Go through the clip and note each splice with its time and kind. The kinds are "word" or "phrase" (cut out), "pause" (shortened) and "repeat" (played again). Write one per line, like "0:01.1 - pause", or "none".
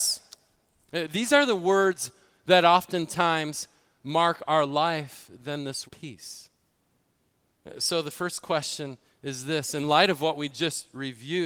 0:05.9 - word